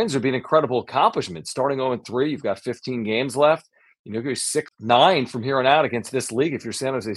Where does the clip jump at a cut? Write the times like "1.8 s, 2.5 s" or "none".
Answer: 4.7 s